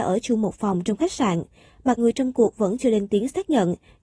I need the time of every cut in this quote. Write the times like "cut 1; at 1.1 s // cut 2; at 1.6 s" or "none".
cut 1; at 2.0 s